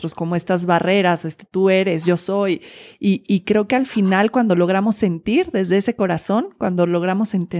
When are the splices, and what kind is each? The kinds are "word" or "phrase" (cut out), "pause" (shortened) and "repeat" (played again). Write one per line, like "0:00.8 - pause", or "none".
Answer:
none